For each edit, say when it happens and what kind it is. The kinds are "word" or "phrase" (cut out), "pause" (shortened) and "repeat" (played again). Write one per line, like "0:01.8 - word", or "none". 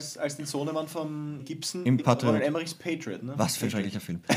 0:01.4 - word
0:02.0 - phrase